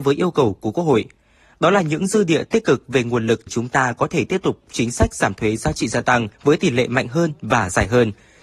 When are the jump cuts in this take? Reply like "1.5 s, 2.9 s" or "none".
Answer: 3.5 s, 6.3 s